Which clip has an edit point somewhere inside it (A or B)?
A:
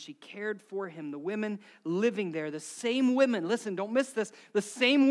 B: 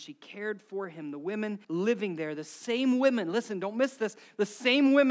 B